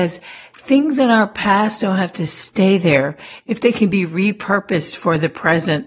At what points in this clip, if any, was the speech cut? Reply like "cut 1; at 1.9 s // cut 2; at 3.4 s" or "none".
none